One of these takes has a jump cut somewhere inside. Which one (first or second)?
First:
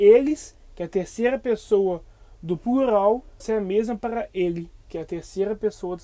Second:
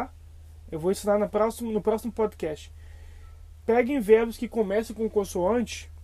first